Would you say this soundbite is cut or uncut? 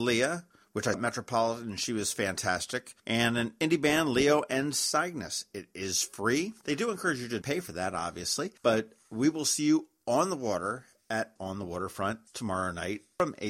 cut